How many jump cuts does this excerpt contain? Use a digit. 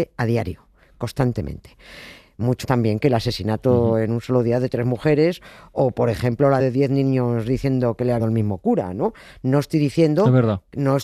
3